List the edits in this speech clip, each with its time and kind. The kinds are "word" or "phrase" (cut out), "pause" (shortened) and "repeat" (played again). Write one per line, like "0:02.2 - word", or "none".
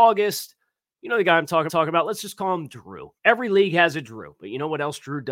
0:01.7 - repeat
0:03.2 - pause